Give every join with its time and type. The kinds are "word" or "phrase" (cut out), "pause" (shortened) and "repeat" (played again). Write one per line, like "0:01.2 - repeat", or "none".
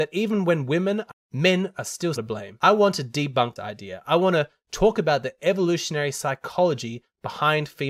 0:01.1 - phrase
0:02.2 - word
0:03.6 - word